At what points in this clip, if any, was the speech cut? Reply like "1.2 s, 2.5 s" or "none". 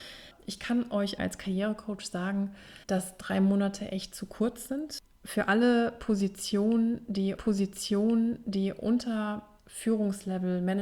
1.2 s, 2.8 s, 7.4 s